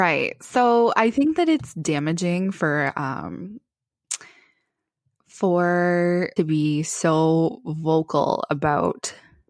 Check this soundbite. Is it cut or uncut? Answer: cut